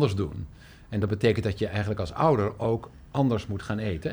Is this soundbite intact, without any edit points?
yes; 0 cuts

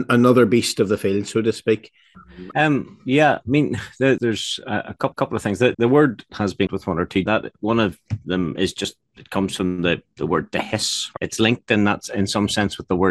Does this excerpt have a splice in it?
yes; 7 cuts; at 4.2 s, 5.1 s, 5.7 s, 6.3 s, 6.7 s, 7.3 s, 11.2 s

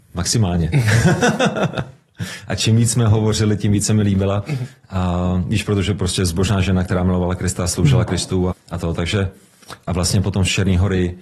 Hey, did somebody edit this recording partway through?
yes; 1 cut; at 8.5 s

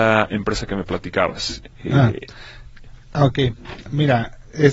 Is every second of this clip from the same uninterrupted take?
yes; 0 cuts

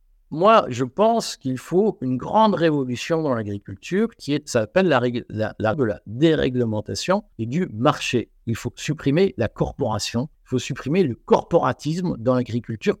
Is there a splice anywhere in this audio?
yes; 3 cuts; at 5.7 s, 7.3 s, 10.3 s

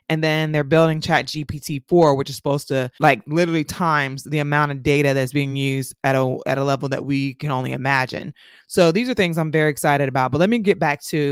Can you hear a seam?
no; 0 cuts

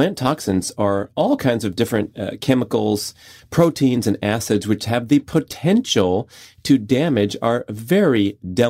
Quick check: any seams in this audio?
no; 0 cuts

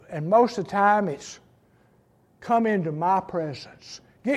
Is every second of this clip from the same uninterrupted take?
yes; 0 cuts

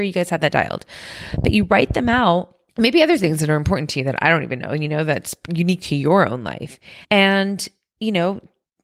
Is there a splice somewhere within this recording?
yes; 2 cuts; at 2.7 s, 7.0 s

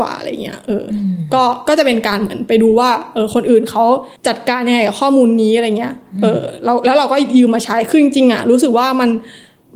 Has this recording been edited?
yes; 1 cut; at 4.2 s

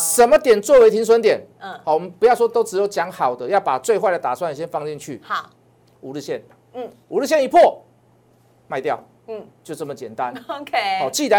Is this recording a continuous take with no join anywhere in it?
yes; 0 cuts

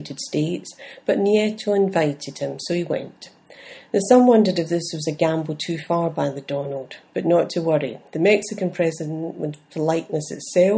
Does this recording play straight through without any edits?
yes; 0 cuts

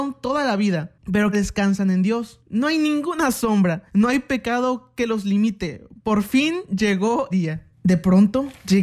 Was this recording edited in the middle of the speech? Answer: yes; 3 cuts; at 1.3 s, 3.9 s, 7.3 s

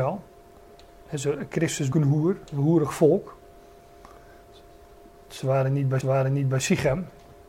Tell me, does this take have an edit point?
yes; 3 cuts; at 1.9 s, 2.5 s, 6.0 s

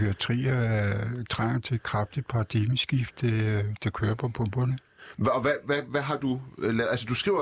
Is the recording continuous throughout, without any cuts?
yes; 0 cuts

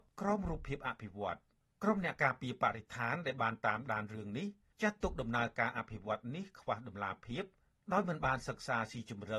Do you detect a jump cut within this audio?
no; 0 cuts

